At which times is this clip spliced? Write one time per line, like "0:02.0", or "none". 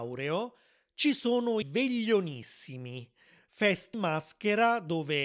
0:01.6
0:03.9